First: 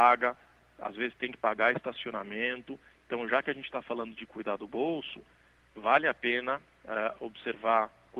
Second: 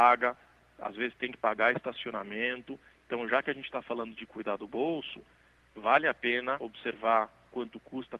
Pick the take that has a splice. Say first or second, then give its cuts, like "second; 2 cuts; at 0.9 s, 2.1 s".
second; 1 cut; at 6.6 s